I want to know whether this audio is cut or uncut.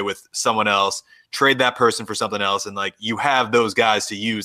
uncut